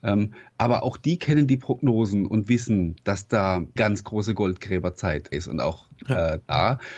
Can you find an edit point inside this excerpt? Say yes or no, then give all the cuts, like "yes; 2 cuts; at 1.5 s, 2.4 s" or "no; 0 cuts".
yes; 2 cuts; at 3.8 s, 5.3 s